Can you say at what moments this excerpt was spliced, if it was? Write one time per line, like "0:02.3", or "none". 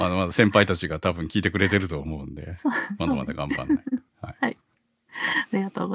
0:04.1